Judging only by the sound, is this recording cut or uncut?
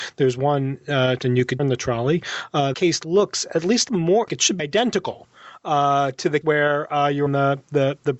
cut